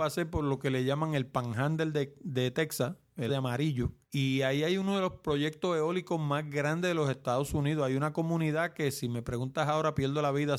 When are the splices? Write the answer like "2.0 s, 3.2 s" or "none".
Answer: 3.3 s, 4.0 s